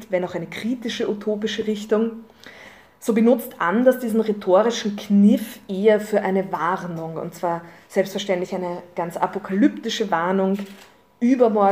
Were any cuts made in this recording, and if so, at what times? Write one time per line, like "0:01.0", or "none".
none